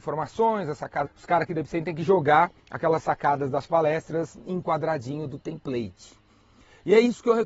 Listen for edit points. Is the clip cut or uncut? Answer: cut